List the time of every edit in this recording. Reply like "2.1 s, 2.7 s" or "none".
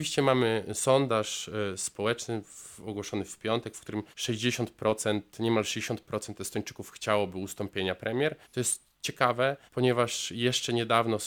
4.1 s, 8.4 s, 9.7 s